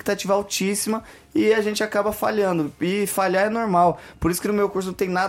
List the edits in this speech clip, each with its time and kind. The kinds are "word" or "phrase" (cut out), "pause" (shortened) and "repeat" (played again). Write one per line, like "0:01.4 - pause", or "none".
none